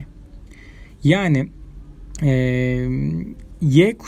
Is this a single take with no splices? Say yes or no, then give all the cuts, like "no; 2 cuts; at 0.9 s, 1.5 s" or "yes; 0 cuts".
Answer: yes; 0 cuts